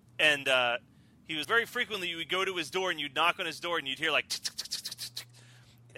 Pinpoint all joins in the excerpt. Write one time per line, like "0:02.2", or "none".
0:01.4